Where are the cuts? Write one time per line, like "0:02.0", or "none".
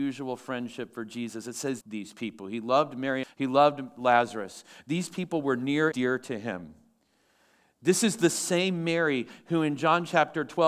0:01.8
0:03.2
0:05.9

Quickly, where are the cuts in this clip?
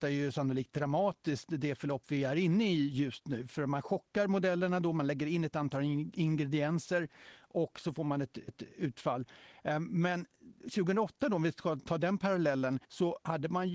0:08.5
0:10.3
0:12.8

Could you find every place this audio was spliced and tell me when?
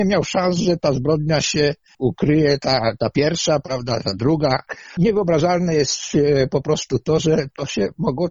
none

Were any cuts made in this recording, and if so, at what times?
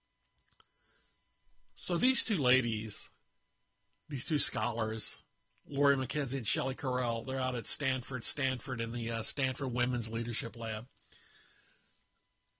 0:08.2

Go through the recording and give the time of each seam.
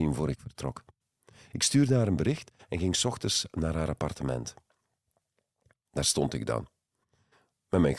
none

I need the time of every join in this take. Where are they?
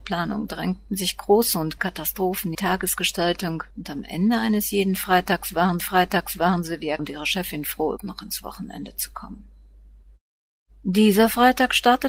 0:01.8
0:02.5
0:03.7
0:05.8
0:07.0
0:08.0

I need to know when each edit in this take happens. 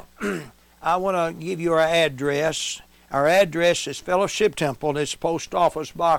none

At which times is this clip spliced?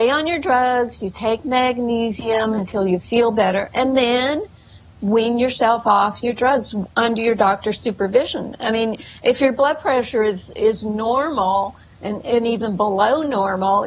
none

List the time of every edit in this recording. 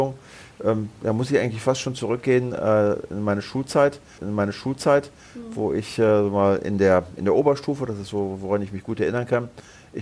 0:04.2

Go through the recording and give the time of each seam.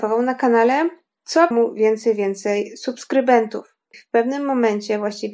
0:01.5
0:03.9

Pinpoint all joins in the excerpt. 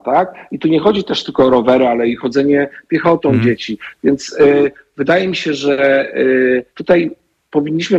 0:06.7

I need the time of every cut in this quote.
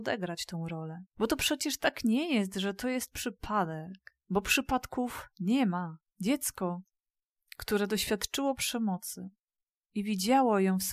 none

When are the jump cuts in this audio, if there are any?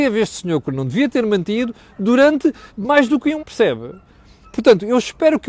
0:02.7
0:03.4

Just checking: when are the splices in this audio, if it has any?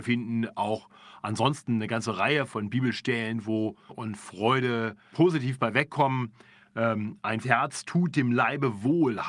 0:02.5
0:03.9
0:05.1
0:07.4

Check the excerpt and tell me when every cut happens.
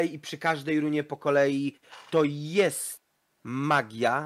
none

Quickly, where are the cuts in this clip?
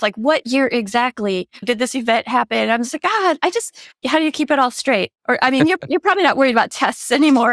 0:05.2

